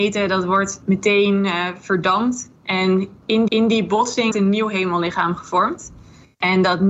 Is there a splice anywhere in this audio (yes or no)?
yes